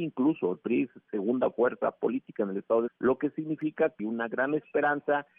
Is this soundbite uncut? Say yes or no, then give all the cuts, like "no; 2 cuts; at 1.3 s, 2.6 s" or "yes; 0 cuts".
no; 2 cuts; at 2.9 s, 4.0 s